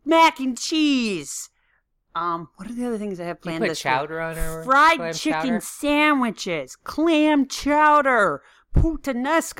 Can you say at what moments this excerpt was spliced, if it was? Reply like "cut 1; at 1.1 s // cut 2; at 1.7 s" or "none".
none